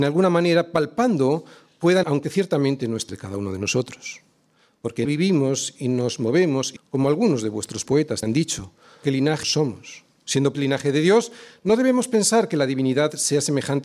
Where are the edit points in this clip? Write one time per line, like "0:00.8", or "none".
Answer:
0:02.0
0:03.1
0:05.0
0:06.8
0:07.8
0:08.2
0:09.0
0:09.4
0:10.5

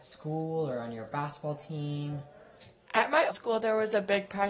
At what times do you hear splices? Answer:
0:03.3

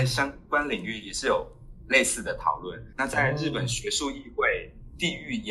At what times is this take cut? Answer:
0:02.9

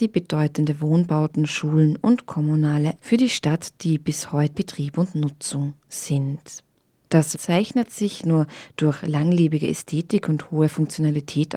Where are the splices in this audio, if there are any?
0:03.0
0:04.5
0:07.3
0:08.2

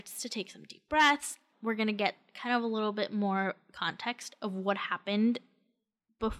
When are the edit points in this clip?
0:01.5

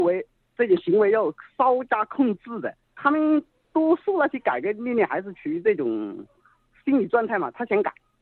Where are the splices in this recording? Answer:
none

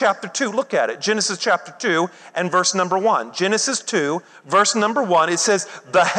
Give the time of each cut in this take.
none

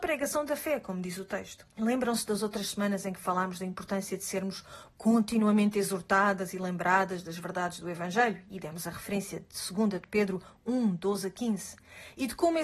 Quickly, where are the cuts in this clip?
0:01.7

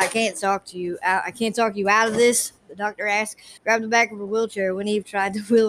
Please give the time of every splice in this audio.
0:03.6

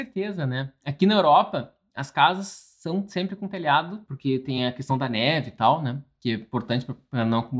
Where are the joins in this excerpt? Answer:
none

